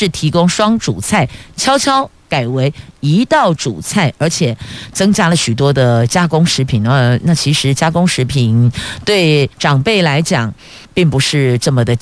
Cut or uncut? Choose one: cut